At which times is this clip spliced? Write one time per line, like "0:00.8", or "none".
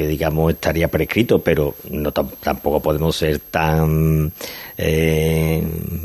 none